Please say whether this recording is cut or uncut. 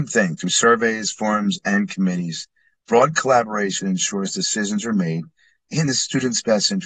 uncut